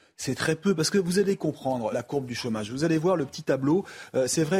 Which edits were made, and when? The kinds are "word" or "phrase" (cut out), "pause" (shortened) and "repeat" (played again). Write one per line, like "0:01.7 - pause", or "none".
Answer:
0:01.9 - word